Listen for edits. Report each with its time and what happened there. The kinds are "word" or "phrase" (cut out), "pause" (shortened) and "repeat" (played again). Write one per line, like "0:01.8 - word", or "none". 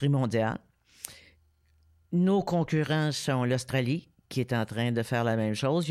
none